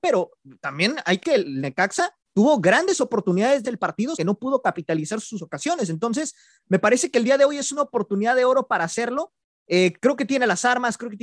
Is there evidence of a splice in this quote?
yes; 4 cuts; at 1.2 s, 2.2 s, 3.6 s, 4.2 s

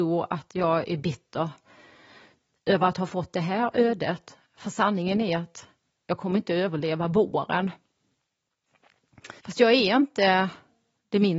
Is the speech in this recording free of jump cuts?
no; 1 cut; at 9.4 s

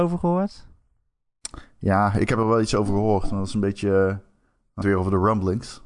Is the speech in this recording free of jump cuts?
no; 1 cut; at 4.8 s

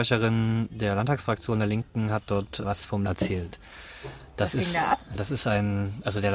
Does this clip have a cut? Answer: yes; 3 cuts; at 2.6 s, 3.1 s, 5.1 s

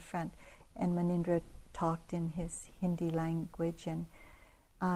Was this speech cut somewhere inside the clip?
no; 0 cuts

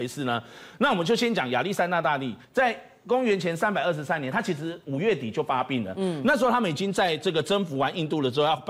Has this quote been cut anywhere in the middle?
yes; 1 cut; at 2.4 s

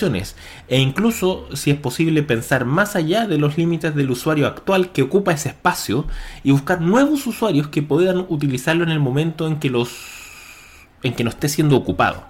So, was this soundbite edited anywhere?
no; 0 cuts

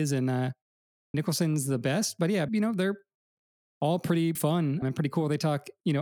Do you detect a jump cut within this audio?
yes; 4 cuts; at 1.1 s, 2.5 s, 4.4 s, 4.8 s

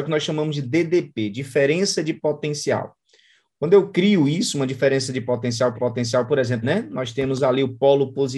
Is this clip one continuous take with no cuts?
no; 2 cuts; at 5.7 s, 6.6 s

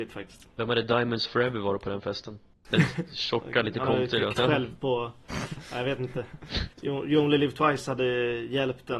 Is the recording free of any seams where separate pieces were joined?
no; 4 cuts; at 1.3 s, 2.5 s, 4.3 s, 6.7 s

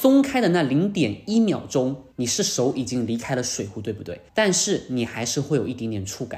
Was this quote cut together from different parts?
yes; 2 cuts; at 2.1 s, 4.3 s

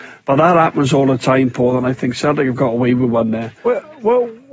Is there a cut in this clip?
yes; 1 cut; at 3.6 s

